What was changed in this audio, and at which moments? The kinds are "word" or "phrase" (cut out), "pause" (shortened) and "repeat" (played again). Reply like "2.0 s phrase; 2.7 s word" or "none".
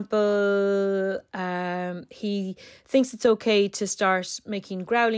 none